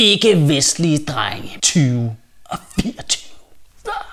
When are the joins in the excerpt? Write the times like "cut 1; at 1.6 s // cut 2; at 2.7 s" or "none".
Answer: cut 1; at 1.6 s